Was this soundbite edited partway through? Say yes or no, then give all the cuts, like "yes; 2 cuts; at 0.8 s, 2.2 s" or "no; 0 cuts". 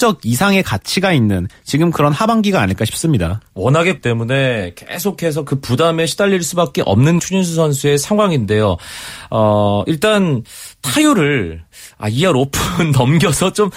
yes; 2 cuts; at 4.0 s, 7.2 s